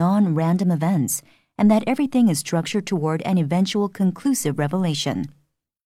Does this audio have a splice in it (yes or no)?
no